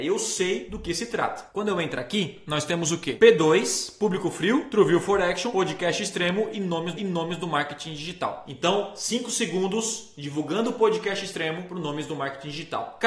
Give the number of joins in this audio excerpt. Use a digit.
1